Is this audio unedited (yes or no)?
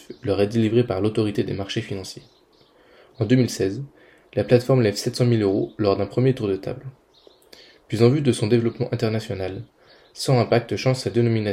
yes